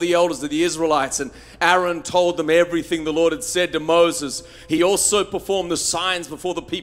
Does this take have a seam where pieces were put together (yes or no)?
no